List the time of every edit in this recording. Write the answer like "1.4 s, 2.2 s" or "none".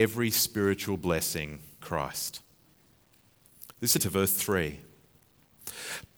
1.8 s, 4.0 s